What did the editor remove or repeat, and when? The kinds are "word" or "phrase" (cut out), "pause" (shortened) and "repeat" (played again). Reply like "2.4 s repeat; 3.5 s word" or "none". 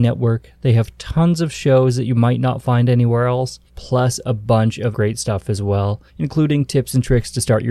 3.7 s pause; 4.9 s word; 6.1 s pause